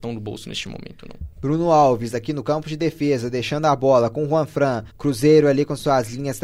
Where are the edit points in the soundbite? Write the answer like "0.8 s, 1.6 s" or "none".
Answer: 1.3 s, 4.9 s